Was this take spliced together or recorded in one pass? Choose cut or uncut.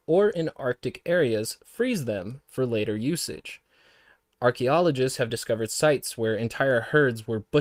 uncut